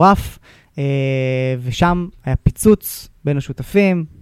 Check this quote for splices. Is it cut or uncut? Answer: uncut